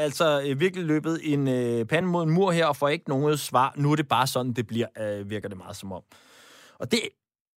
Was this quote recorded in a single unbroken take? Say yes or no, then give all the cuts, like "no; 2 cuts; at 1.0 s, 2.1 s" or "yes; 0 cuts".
yes; 0 cuts